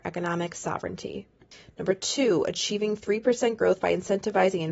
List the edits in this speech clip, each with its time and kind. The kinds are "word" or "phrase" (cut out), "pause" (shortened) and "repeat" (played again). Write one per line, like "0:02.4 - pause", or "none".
none